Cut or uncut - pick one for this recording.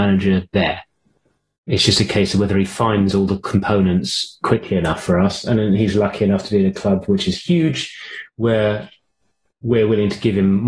uncut